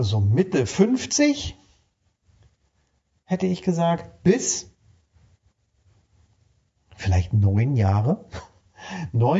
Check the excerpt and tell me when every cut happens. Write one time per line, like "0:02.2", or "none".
none